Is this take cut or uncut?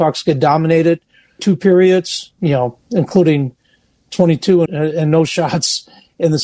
cut